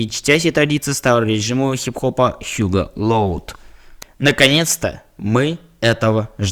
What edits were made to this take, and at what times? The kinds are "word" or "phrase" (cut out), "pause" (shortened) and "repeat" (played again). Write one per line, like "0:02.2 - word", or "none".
none